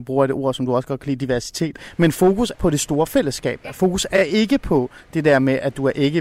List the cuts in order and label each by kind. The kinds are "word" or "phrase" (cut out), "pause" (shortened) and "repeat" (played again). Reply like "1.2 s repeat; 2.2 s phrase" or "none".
2.5 s word